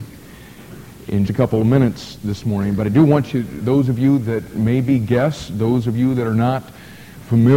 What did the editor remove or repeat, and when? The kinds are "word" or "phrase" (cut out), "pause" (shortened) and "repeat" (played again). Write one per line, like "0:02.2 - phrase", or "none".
0:01.3 - word